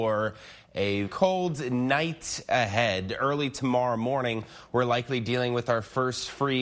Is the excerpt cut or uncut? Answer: cut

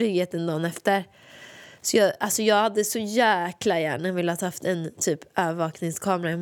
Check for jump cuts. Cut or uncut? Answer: uncut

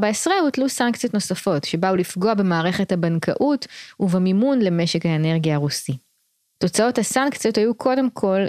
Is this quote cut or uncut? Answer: uncut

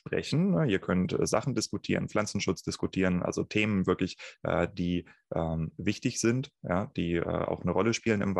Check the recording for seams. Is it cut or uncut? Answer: uncut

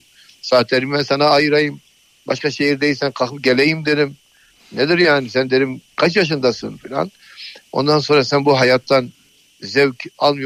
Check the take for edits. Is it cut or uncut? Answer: uncut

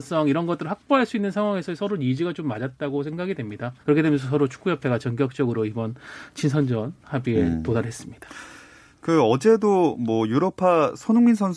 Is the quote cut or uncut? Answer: cut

